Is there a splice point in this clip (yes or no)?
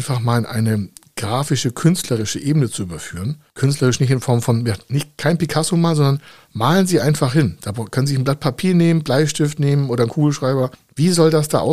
yes